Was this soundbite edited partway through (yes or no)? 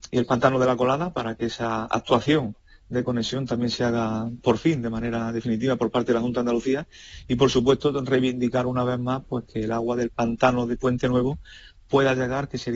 no